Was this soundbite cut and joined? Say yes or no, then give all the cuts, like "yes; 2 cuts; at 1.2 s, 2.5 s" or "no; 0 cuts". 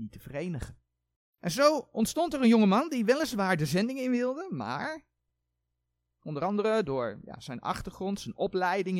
yes; 1 cut; at 1.1 s